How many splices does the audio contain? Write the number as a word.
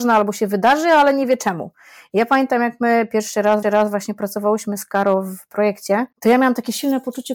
two